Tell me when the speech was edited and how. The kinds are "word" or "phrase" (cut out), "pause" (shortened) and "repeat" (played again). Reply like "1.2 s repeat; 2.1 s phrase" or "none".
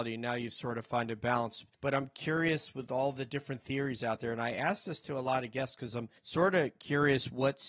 1.7 s pause; 6.2 s pause